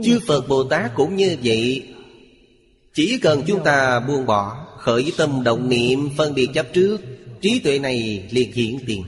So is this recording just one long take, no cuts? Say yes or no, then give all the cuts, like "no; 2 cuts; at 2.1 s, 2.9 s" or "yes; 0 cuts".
yes; 0 cuts